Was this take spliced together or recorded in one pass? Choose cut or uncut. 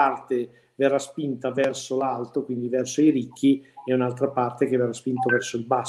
uncut